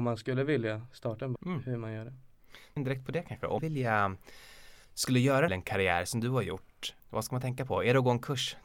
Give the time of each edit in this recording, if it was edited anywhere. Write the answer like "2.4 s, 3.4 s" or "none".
1.4 s, 2.8 s, 3.6 s, 4.8 s, 5.5 s, 7.0 s